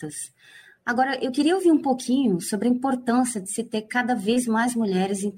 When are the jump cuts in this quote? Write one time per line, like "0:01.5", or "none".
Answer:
none

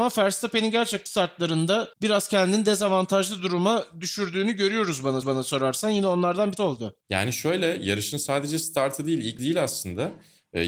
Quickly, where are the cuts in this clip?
0:01.1
0:01.9
0:05.2
0:06.6
0:07.0
0:09.4

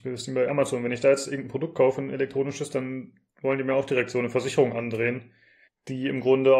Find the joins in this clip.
0:05.7

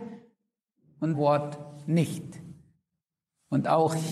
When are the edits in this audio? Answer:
0:01.1

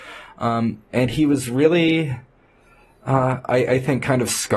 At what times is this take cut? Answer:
none

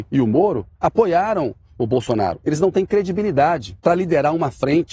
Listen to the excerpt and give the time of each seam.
0:03.8

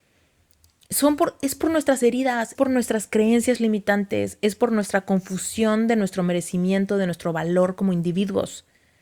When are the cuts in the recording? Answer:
0:02.5

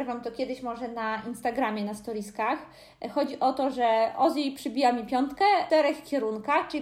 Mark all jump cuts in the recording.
none

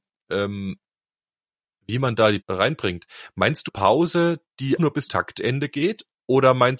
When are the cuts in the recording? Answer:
0:02.4
0:03.7
0:04.8
0:05.1

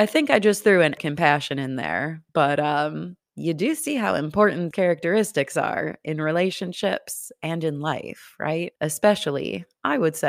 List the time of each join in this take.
0:01.0
0:02.3
0:04.7
0:08.8

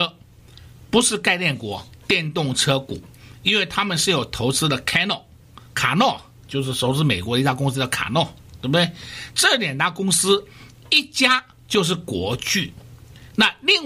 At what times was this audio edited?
none

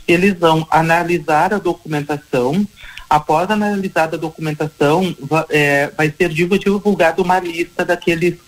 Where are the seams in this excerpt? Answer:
none

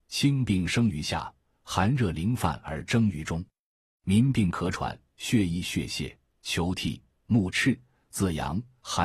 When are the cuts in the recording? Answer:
none

